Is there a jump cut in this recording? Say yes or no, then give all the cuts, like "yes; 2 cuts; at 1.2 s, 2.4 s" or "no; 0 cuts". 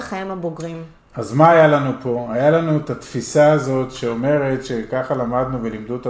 no; 0 cuts